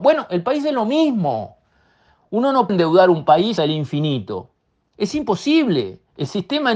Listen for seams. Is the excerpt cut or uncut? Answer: cut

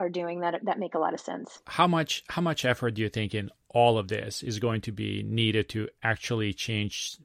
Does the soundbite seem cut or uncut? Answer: uncut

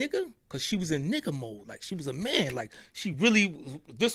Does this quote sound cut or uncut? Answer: uncut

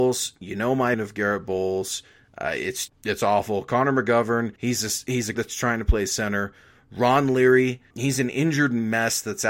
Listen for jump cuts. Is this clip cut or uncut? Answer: cut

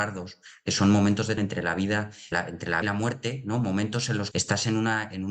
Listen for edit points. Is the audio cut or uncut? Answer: cut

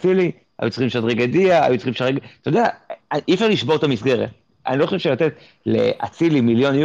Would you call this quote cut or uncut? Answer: uncut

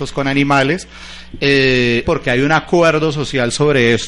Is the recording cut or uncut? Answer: cut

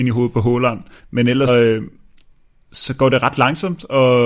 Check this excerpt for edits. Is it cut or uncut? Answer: cut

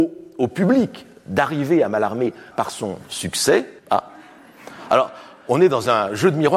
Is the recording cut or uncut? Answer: cut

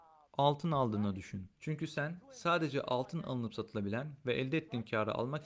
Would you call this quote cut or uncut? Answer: uncut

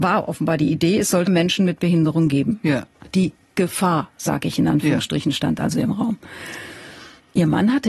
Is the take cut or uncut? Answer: cut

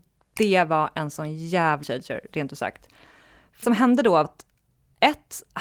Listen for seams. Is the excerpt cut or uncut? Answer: cut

